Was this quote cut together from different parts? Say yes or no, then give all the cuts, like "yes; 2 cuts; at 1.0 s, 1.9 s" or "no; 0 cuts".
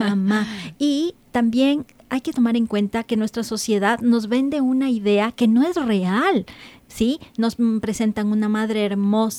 no; 0 cuts